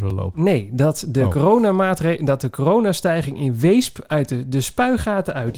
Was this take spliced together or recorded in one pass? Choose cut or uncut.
uncut